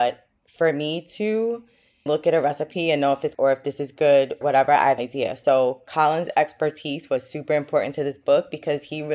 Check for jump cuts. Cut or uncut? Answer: cut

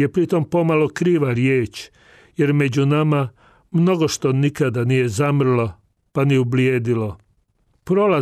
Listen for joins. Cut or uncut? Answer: uncut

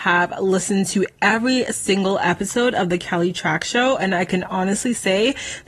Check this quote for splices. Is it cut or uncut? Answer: uncut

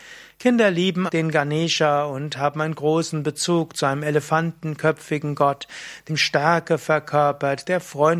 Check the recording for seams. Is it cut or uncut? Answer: cut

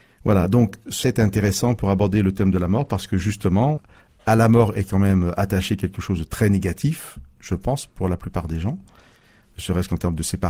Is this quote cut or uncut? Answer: cut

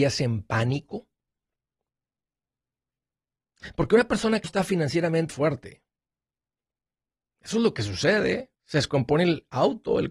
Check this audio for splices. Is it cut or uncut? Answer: cut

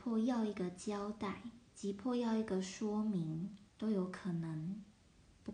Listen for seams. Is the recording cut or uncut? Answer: cut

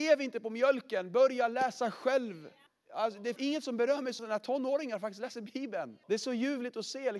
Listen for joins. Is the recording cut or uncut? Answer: cut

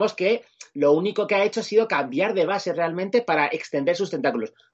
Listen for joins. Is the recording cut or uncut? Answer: uncut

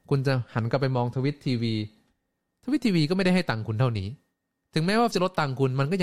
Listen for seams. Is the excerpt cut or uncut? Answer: cut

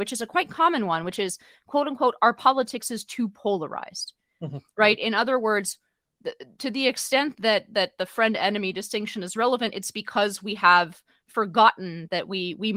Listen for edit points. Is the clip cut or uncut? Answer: uncut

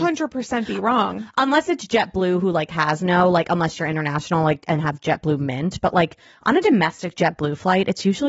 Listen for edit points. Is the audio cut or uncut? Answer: uncut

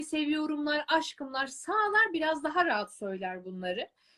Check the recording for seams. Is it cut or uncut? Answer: uncut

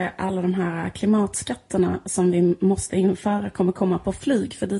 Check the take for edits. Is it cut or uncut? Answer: uncut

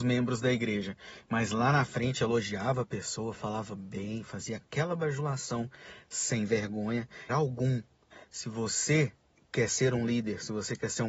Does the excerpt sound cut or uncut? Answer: cut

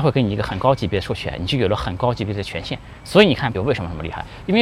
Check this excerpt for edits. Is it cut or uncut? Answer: cut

